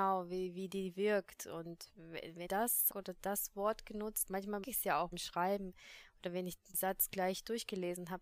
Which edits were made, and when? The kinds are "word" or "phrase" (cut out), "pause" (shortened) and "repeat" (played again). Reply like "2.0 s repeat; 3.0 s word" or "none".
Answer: 2.5 s word; 2.9 s word; 4.3 s word; 4.6 s word; 5.1 s word; 6.7 s word